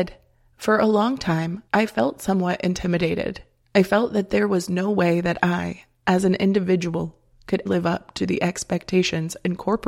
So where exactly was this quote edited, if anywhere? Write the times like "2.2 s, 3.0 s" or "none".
1.7 s, 3.6 s, 7.7 s